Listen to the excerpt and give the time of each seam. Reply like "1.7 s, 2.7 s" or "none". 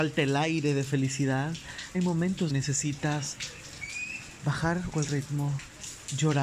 1.9 s, 2.5 s, 4.9 s